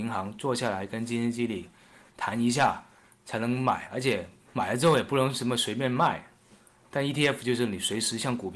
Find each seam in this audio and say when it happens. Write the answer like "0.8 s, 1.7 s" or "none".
none